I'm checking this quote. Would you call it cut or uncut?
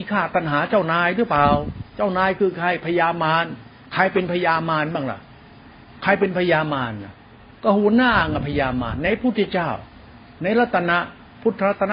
uncut